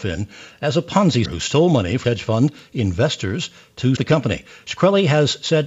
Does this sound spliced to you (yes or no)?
yes